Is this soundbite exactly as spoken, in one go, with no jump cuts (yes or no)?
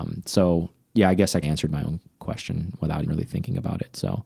no